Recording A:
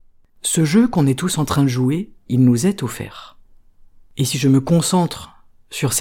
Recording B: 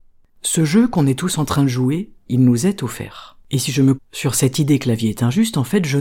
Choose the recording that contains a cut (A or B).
B